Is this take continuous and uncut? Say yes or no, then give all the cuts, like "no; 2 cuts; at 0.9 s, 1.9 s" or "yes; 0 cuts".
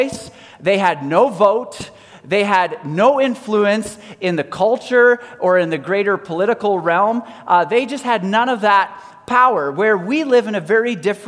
yes; 0 cuts